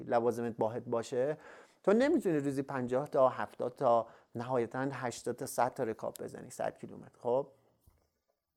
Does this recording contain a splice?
no; 0 cuts

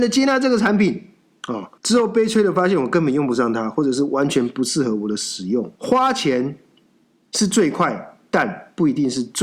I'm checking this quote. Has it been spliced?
yes; 2 cuts; at 1.8 s, 5.7 s

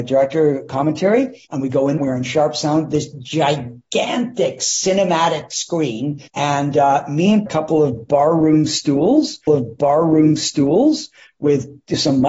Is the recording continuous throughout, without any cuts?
no; 5 cuts; at 1.4 s, 2.0 s, 6.3 s, 7.5 s, 9.5 s

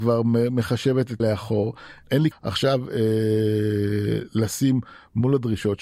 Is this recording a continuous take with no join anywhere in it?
no; 2 cuts; at 1.2 s, 2.3 s

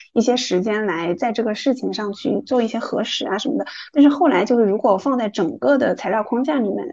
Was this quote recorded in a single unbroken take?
yes; 0 cuts

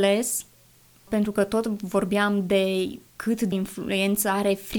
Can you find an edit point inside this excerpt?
yes; 3 cuts; at 1.1 s, 3.1 s, 3.5 s

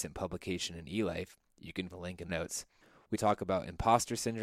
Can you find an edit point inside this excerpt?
yes; 3 cuts; at 1.9 s, 2.3 s, 3.1 s

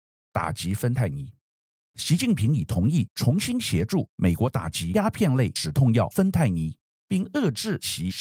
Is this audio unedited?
yes; 0 cuts

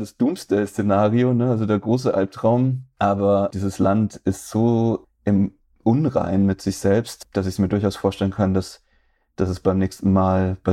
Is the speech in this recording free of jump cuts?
yes; 0 cuts

